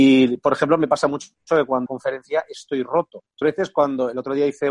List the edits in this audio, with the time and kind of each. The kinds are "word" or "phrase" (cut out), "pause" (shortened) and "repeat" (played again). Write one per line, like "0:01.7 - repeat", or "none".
0:01.9 - phrase
0:03.4 - word

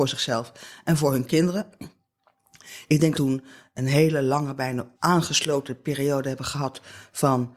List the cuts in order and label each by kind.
0:03.1 - phrase
0:04.9 - pause

